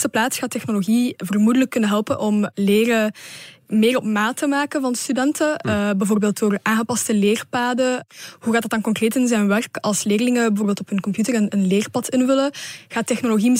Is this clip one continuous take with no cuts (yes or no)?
yes